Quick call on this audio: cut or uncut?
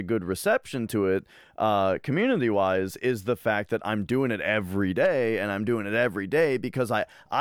uncut